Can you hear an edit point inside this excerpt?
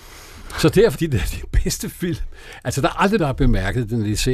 yes; 2 cuts; at 0.9 s, 3.2 s

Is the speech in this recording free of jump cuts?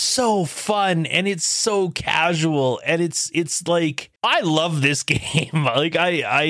no; 1 cut; at 4.2 s

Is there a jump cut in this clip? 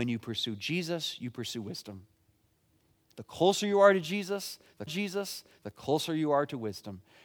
yes; 1 cut; at 4.9 s

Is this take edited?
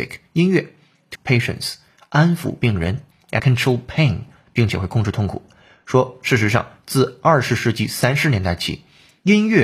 yes; 2 cuts; at 1.1 s, 3.4 s

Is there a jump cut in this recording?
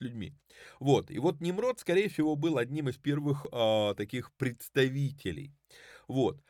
no; 0 cuts

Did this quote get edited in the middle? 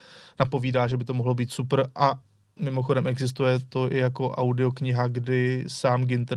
no; 0 cuts

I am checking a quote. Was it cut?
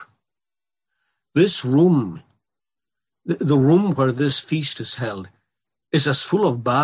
no; 0 cuts

